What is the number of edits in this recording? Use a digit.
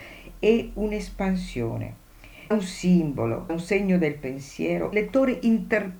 3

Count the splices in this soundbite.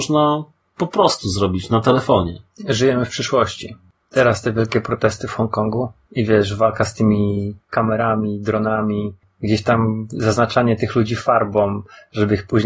0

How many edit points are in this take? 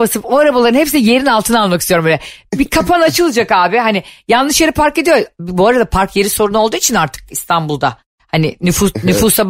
0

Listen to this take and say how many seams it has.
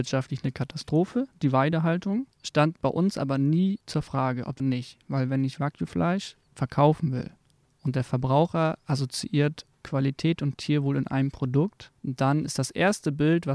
4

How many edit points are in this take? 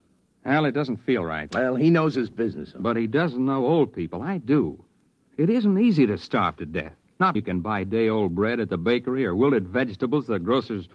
1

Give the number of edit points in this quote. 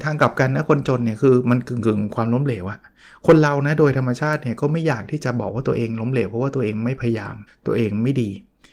1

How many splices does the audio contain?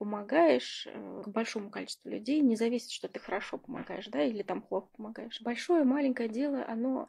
1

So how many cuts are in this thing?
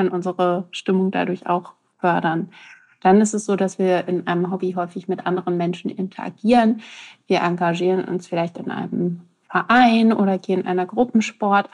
0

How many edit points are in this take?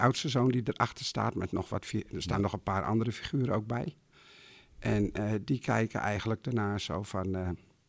0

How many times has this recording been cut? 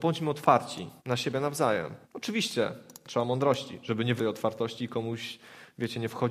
3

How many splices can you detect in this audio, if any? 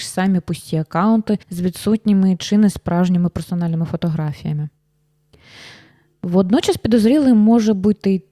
1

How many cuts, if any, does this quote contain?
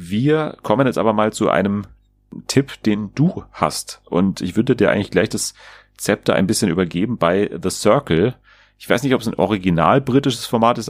0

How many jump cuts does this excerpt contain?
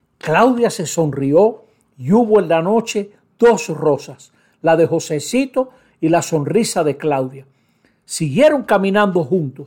0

